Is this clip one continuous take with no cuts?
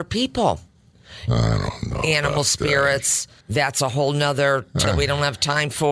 no; 2 cuts; at 3.4 s, 4.8 s

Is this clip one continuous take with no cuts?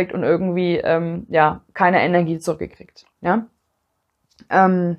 no; 1 cut; at 3.1 s

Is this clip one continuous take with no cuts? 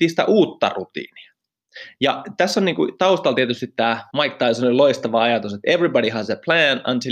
no; 1 cut; at 4.1 s

